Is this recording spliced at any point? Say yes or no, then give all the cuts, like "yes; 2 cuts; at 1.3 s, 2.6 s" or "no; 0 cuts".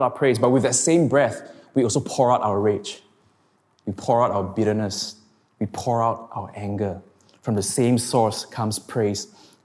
no; 0 cuts